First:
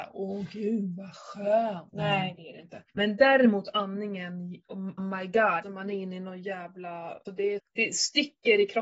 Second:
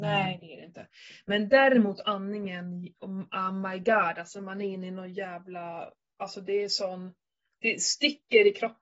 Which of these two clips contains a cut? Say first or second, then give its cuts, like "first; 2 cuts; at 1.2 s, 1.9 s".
first; 6 cuts; at 1.9 s, 2.9 s, 5.0 s, 5.6 s, 7.3 s, 7.6 s